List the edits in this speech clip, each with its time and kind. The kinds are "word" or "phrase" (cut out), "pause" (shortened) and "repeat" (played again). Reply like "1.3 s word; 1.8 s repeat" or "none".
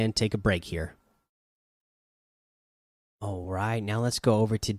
none